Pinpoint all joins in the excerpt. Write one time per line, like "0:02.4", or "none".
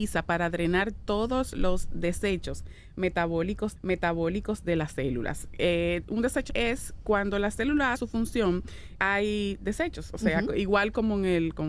0:03.8
0:06.5
0:07.9
0:09.0

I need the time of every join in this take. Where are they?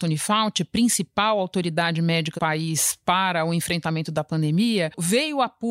0:02.4

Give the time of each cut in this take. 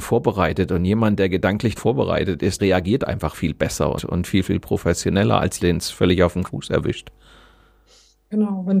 0:01.8
0:02.6
0:03.3
0:04.0
0:05.6
0:06.4

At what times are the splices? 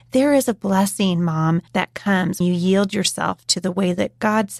0:01.7
0:02.4

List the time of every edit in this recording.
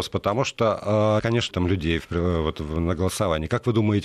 0:01.2
0:01.5

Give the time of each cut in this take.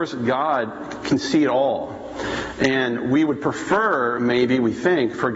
none

